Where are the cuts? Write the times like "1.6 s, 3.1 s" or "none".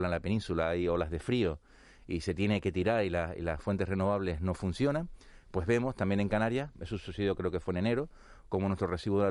none